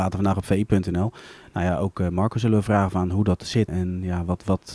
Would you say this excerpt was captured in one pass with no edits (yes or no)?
no